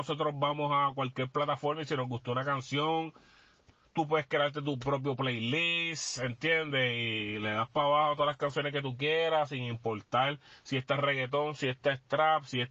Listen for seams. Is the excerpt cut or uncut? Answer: uncut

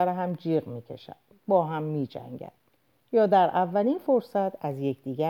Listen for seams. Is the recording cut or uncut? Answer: uncut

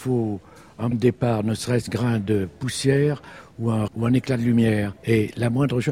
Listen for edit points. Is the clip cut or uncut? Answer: cut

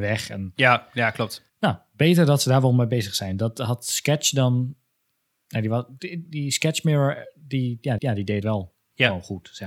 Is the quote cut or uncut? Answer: cut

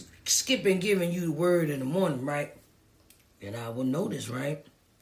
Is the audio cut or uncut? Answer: uncut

